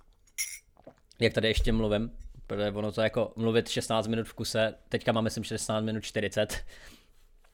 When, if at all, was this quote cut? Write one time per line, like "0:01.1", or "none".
none